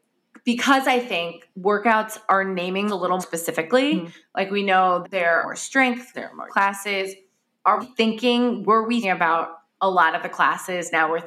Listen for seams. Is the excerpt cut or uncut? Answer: cut